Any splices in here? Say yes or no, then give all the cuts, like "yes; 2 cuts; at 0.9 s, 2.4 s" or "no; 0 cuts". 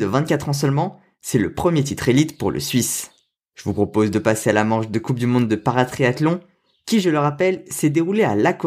no; 0 cuts